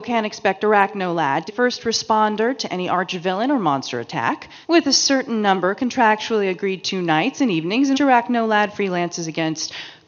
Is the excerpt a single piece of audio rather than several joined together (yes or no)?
no